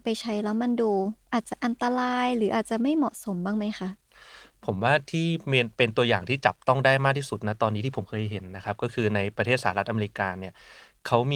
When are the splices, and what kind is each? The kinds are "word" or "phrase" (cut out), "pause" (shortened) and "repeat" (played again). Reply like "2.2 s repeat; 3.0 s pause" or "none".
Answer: 1.2 s pause